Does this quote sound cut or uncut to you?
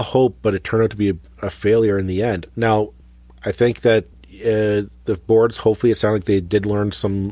uncut